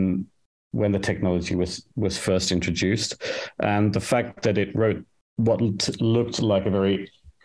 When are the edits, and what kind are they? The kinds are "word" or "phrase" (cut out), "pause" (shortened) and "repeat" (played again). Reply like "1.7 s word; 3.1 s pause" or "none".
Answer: none